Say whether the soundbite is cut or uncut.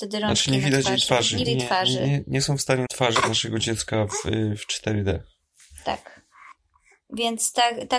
cut